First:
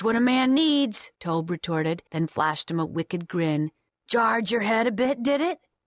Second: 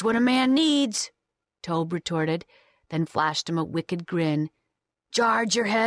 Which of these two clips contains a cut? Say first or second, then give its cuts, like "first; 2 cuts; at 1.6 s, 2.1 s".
first; 3 cuts; at 1.2 s, 2.1 s, 3.9 s